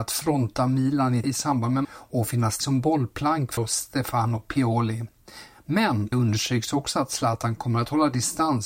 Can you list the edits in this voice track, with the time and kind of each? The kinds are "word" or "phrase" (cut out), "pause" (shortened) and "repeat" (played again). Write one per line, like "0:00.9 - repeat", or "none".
0:01.2 - word
0:01.8 - word
0:02.6 - word
0:03.6 - word
0:06.1 - word